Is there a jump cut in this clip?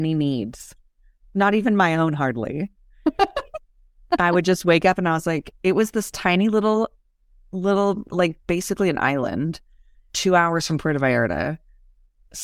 yes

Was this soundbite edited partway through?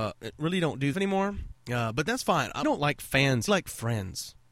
yes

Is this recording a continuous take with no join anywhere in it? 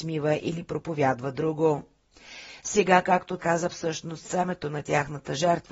no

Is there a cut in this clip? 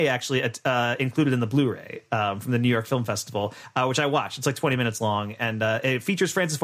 no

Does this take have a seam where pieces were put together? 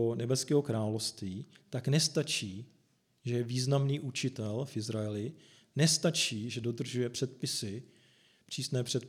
no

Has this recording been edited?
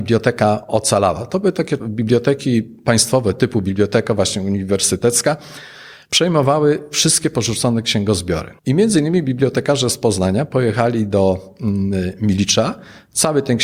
yes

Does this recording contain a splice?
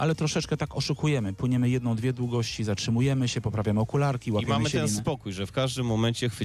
no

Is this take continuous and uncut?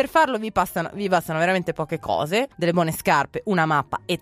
no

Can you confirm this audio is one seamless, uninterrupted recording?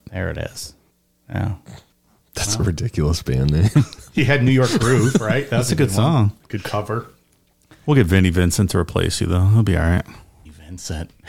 yes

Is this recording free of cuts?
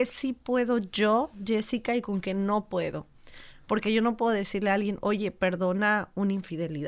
yes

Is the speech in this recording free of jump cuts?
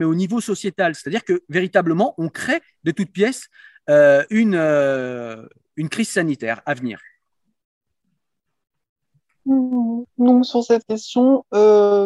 yes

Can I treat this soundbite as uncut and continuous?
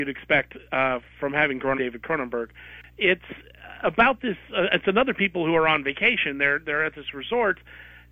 no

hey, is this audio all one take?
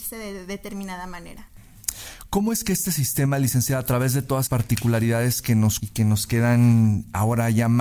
no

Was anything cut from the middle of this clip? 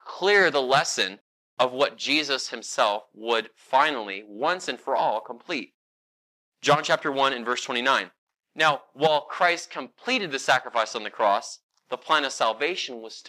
no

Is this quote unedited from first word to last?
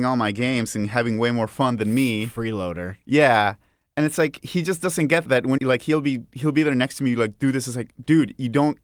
no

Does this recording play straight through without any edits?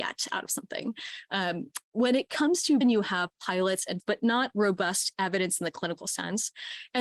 no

